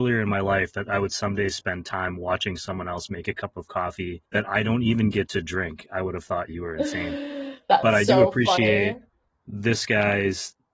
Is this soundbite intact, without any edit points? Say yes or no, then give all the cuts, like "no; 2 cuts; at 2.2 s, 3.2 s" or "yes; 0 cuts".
no; 2 cuts; at 4.2 s, 9.1 s